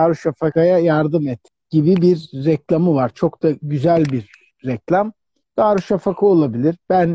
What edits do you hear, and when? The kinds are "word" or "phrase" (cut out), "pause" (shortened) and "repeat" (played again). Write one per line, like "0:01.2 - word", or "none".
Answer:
none